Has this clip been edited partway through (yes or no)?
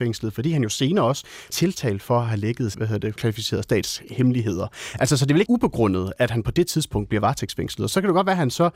yes